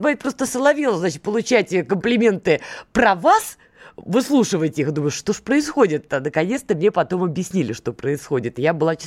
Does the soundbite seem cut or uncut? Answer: uncut